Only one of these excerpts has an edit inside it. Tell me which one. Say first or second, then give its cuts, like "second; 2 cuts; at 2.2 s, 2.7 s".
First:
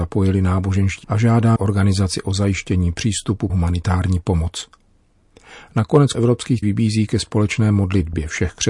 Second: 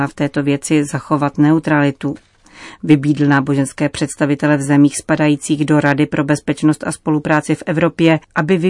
first; 5 cuts; at 1.0 s, 1.6 s, 3.5 s, 6.1 s, 6.6 s